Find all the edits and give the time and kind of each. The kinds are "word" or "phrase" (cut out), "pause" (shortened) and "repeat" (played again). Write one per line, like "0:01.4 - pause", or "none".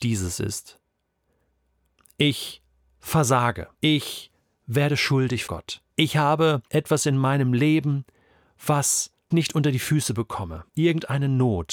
0:03.7 - pause
0:05.5 - word
0:05.9 - pause
0:06.7 - pause
0:09.3 - word
0:10.7 - pause

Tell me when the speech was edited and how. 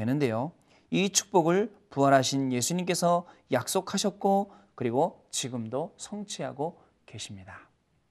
none

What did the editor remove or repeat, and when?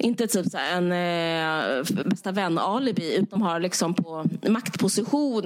0:02.0 - word
0:03.4 - word

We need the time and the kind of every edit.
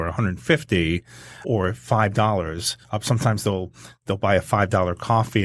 0:01.4 - word
0:02.8 - pause

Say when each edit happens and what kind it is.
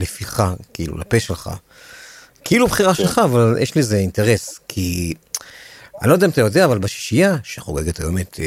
none

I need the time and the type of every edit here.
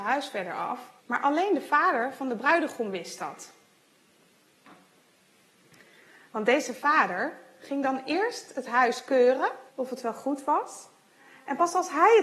0:01.0 - pause
0:09.7 - pause

